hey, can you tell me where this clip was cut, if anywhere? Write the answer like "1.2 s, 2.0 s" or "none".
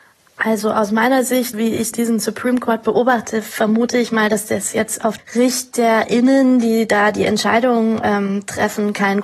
1.5 s, 1.9 s, 5.2 s